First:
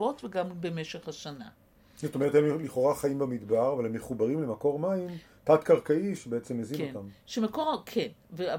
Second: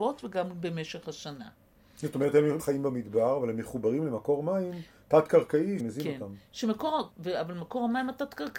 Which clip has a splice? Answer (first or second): second